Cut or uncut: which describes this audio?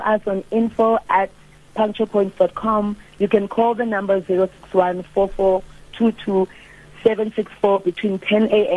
uncut